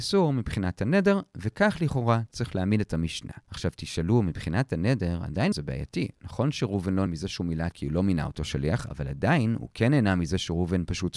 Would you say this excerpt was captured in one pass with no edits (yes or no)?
no